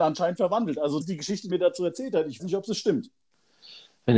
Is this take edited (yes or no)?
yes